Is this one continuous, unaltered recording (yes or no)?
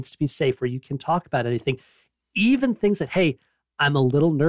yes